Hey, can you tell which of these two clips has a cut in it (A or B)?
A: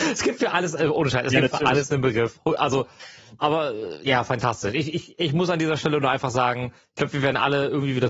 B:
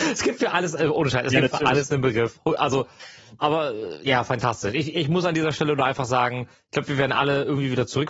B